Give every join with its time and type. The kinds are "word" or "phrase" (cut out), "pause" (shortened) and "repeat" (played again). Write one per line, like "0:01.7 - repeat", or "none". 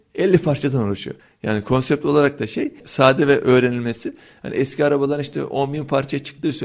none